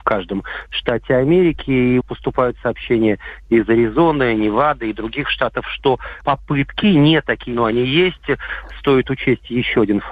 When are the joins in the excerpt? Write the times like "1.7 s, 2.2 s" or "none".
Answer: 2.0 s, 6.2 s, 7.5 s

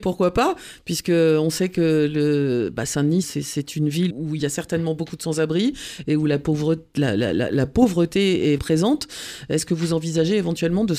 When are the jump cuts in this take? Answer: 3.2 s, 4.1 s, 8.6 s

